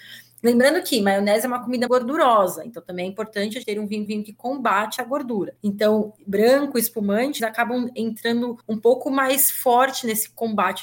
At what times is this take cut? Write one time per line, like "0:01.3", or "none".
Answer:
0:01.9
0:03.6
0:04.1
0:05.0
0:05.6
0:07.4
0:08.6

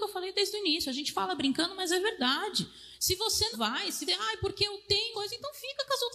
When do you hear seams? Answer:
0:03.5
0:04.1
0:05.1

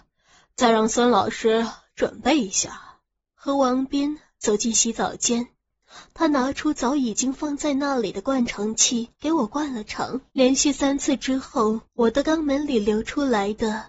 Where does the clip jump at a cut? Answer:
0:03.1
0:09.1
0:10.3
0:11.9

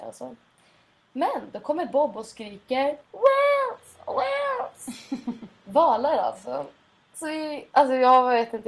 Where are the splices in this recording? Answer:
0:03.0

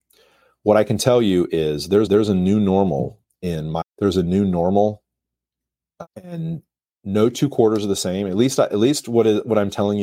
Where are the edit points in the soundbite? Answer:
0:02.1
0:03.2
0:03.8
0:06.0

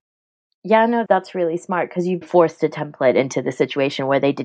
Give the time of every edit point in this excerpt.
0:01.0
0:02.2

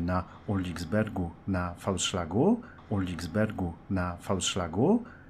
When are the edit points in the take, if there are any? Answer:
0:02.8

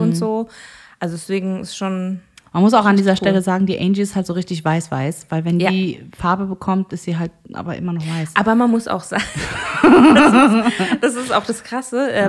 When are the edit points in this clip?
none

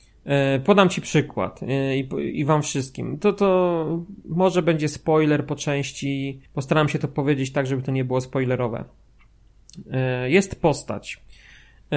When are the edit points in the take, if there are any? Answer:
0:06.5

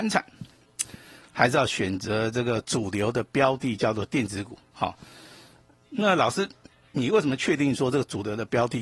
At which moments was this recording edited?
none

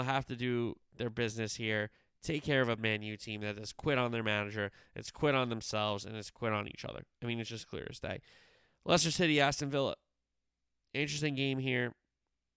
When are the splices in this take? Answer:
0:02.8

